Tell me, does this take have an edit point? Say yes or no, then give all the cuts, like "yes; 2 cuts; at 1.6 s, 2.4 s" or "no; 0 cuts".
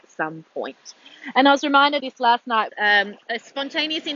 yes; 3 cuts; at 2.0 s, 2.7 s, 3.2 s